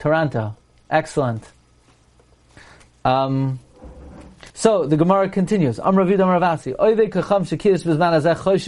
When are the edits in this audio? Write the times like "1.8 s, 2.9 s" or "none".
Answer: 4.5 s